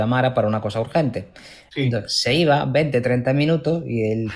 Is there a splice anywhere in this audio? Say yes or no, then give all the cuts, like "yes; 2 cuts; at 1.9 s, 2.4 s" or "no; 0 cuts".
no; 0 cuts